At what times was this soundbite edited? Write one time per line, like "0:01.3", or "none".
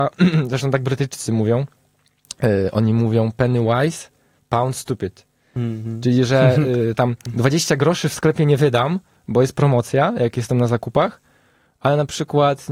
none